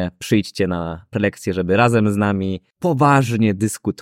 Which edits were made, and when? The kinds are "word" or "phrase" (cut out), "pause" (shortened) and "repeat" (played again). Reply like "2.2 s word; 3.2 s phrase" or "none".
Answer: 2.7 s pause